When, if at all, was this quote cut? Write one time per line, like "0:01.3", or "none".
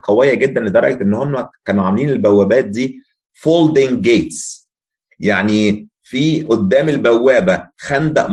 none